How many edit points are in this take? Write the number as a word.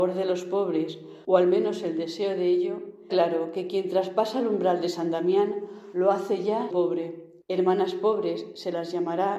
two